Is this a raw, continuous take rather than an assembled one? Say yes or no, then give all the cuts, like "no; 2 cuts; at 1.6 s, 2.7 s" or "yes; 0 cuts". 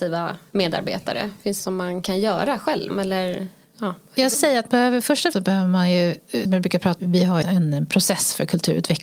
no; 8 cuts; at 1.6 s, 2.9 s, 4.3 s, 4.7 s, 5.3 s, 6.5 s, 7.0 s, 7.4 s